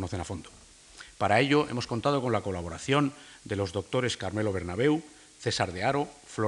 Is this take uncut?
yes; 0 cuts

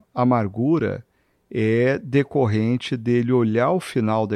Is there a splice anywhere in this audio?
no; 0 cuts

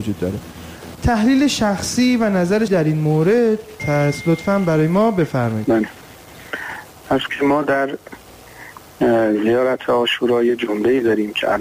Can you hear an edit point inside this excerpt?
yes; 3 cuts; at 2.7 s, 3.8 s, 7.3 s

